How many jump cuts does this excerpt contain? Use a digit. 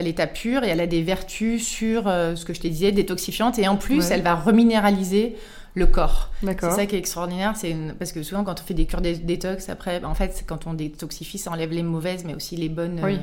0